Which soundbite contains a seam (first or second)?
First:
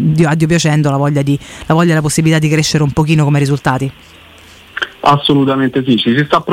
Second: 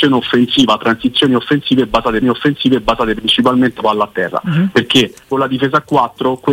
second